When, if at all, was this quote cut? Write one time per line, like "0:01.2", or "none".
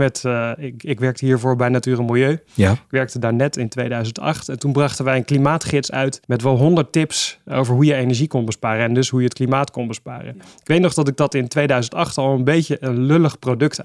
0:06.2